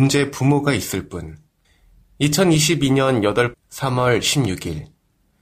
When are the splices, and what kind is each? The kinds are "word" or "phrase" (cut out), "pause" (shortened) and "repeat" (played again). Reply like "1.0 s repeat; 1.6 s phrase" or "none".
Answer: 1.6 s pause; 3.5 s phrase